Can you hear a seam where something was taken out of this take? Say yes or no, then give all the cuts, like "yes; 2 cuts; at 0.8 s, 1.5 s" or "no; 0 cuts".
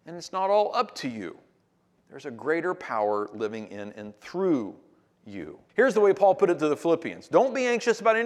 yes; 1 cut; at 5.7 s